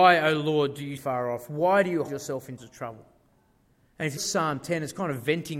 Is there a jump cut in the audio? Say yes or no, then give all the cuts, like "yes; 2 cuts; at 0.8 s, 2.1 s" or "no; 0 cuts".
yes; 4 cuts; at 1.0 s, 2.1 s, 2.6 s, 4.2 s